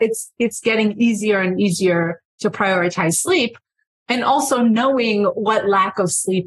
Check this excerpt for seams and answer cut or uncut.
uncut